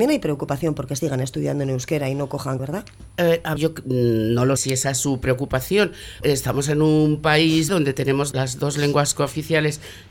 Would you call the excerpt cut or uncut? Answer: cut